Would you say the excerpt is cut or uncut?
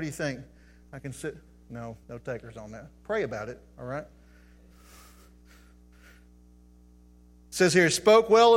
cut